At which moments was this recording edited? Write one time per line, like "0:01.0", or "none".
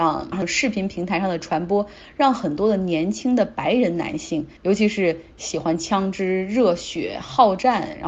0:04.6